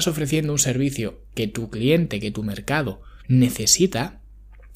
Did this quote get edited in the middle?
yes; 1 cut; at 3.2 s

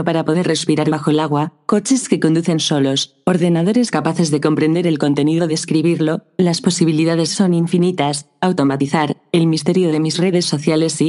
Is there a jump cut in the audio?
yes; 1 cut; at 5.5 s

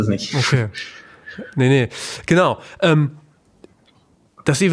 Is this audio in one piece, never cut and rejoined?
yes; 0 cuts

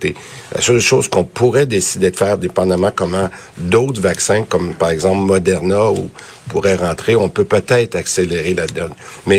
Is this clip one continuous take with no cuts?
yes; 0 cuts

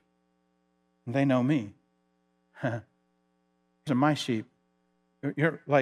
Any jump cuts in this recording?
yes; 1 cut; at 3.9 s

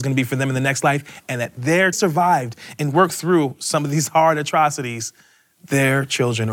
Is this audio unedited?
no; 1 cut; at 1.9 s

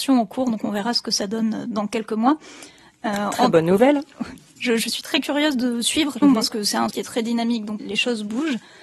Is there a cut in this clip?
yes; 3 cuts; at 6.2 s, 6.9 s, 7.8 s

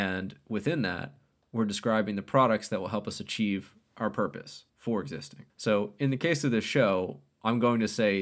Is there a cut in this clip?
yes; 1 cut; at 4.7 s

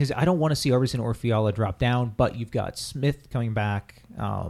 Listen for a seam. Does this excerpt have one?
yes; 1 cut; at 3.3 s

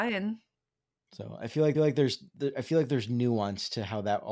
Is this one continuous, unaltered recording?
no; 1 cut; at 1.7 s

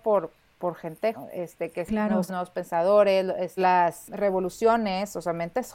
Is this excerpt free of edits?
no; 4 cuts; at 1.1 s, 1.9 s, 2.3 s, 3.6 s

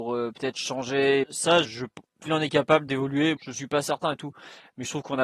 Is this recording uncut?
no; 5 cuts; at 1.2 s, 1.6 s, 2.3 s, 2.9 s, 3.4 s

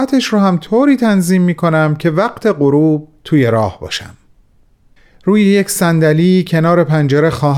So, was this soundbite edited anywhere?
no; 0 cuts

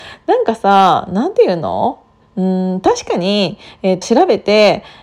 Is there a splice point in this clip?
yes; 1 cut; at 4.0 s

